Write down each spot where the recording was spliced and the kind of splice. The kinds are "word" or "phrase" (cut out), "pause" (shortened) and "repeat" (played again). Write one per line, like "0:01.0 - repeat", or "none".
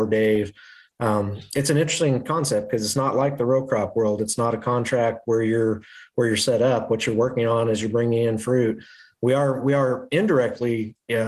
none

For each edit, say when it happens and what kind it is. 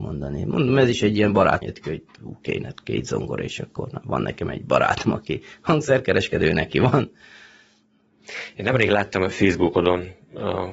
0:01.6 - phrase

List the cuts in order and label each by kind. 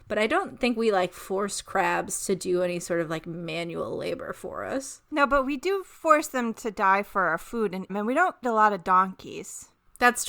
0:07.9 - phrase
0:08.4 - word

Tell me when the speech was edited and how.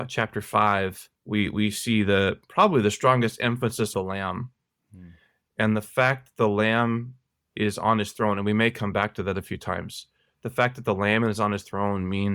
0:01.2 - pause
0:03.9 - phrase

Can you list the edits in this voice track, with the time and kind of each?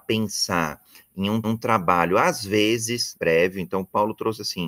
0:01.4 - repeat
0:03.1 - word

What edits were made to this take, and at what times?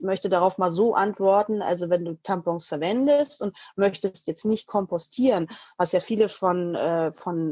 none

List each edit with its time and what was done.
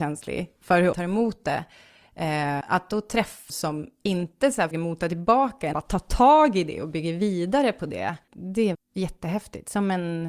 0:00.9 - word
0:02.6 - word
0:03.5 - word
0:04.7 - word
0:05.7 - word
0:08.7 - word

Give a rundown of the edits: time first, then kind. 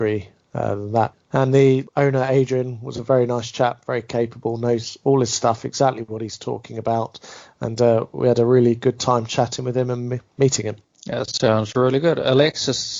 0:10.8 - pause

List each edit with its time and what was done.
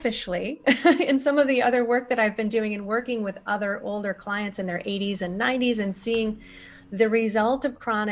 none

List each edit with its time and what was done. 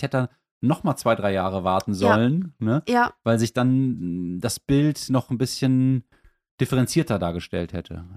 none

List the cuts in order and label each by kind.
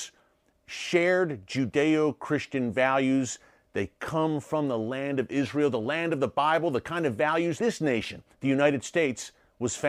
0:07.6 - word
0:08.3 - pause

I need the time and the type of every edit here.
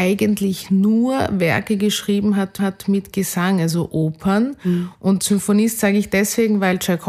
0:02.6 - repeat

